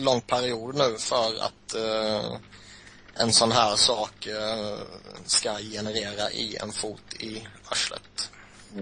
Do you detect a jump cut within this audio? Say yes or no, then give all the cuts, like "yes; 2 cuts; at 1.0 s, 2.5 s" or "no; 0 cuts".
no; 0 cuts